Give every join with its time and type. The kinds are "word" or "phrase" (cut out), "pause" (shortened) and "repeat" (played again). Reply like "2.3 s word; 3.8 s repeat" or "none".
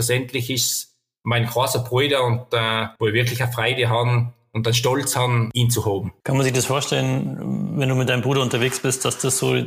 3.0 s pause